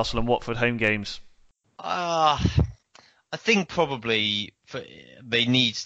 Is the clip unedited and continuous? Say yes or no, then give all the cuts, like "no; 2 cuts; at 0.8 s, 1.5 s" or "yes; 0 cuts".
yes; 0 cuts